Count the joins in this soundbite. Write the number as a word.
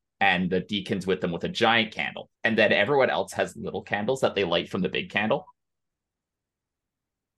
one